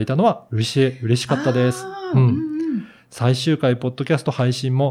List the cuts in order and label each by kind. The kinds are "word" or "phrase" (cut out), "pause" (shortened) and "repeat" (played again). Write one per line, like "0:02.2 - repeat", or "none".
none

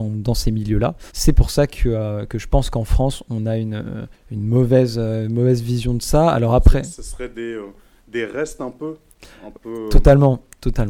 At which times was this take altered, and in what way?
0:01.1 - pause
0:04.1 - pause

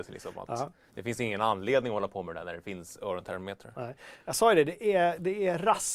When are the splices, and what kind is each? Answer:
none

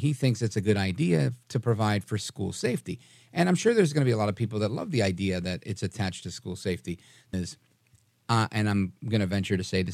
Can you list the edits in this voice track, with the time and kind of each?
0:07.3 - word

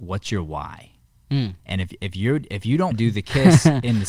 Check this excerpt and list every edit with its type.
0:01.6 - pause
0:02.9 - word

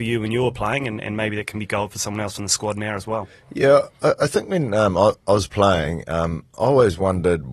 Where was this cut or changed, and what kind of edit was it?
0:03.9 - pause

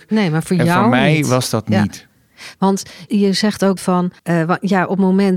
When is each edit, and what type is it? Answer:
0:03.1 - word
0:03.8 - word
0:04.2 - pause

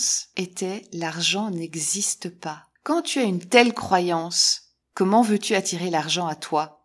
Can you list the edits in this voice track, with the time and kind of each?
0:02.8 - pause
0:04.8 - pause

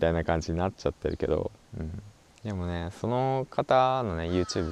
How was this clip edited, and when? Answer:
none

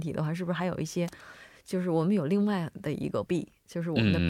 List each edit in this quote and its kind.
0:03.3 - word

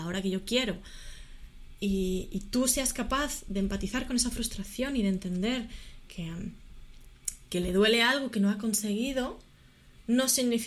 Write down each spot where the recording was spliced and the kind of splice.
0:06.1 - word

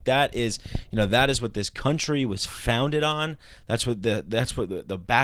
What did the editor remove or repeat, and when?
none

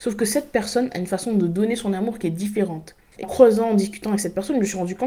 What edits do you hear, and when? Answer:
0:03.2 - word

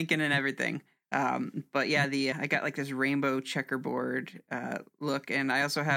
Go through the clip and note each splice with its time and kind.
0:02.3 - word

